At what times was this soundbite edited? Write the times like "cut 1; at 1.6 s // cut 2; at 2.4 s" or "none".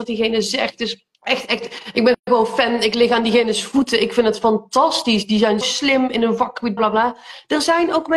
cut 1; at 1.1 s // cut 2; at 5.6 s // cut 3; at 6.8 s